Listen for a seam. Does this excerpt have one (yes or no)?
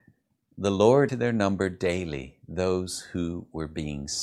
yes